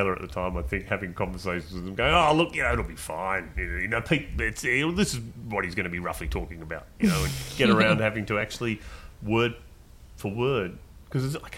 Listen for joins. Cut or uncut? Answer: uncut